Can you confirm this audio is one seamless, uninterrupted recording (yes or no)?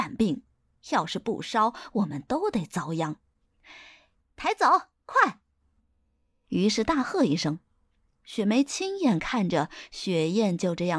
yes